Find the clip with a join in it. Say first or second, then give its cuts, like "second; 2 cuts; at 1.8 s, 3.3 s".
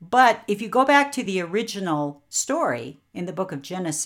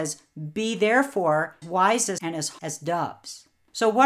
second; 3 cuts; at 1.6 s, 2.2 s, 2.6 s